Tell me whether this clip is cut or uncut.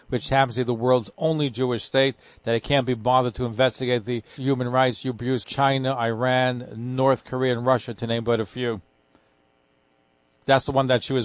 cut